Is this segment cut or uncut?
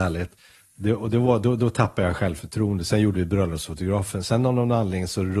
uncut